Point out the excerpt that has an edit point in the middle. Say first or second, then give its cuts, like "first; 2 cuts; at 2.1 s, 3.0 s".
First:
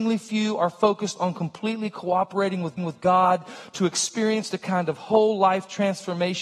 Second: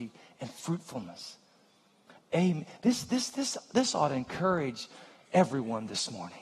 first; 1 cut; at 2.8 s